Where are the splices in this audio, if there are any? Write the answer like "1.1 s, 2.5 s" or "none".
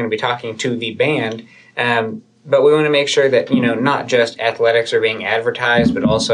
none